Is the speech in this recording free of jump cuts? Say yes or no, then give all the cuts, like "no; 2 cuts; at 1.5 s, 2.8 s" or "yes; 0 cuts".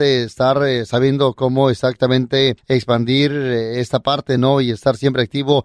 yes; 0 cuts